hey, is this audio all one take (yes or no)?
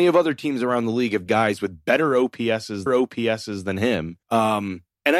no